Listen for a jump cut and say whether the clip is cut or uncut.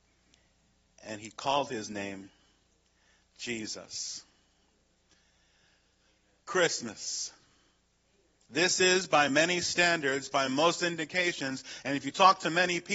uncut